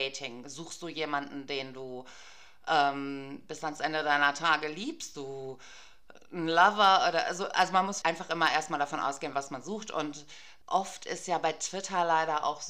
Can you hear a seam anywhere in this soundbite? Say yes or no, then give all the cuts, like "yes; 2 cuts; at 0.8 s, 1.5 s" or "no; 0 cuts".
yes; 3 cuts; at 5.1 s, 8.0 s, 10.6 s